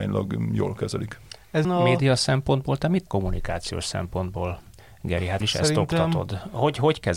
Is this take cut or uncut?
cut